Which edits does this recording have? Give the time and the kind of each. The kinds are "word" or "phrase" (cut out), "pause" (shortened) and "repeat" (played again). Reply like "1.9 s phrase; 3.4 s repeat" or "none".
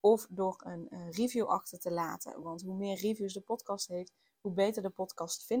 none